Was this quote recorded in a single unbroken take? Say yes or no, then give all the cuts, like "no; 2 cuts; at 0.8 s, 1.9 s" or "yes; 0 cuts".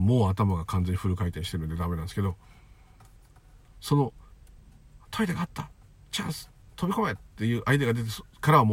yes; 0 cuts